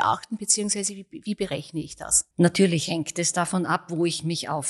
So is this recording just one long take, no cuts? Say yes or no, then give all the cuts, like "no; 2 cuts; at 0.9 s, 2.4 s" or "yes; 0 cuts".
no; 1 cut; at 2.3 s